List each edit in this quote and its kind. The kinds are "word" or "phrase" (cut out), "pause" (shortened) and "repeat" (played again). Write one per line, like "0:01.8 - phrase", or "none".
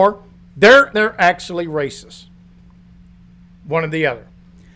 0:00.9 - phrase